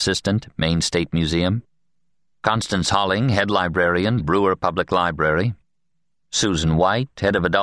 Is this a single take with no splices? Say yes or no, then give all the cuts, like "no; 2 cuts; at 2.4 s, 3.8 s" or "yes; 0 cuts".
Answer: yes; 0 cuts